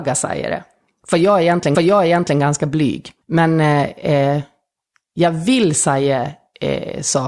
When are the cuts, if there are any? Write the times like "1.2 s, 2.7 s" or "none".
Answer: 1.7 s, 3.2 s